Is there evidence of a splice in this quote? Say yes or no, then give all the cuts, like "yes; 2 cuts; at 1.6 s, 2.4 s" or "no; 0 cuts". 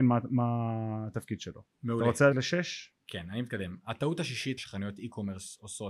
yes; 3 cuts; at 1.7 s, 2.3 s, 4.6 s